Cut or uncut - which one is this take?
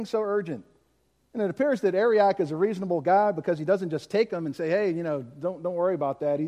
uncut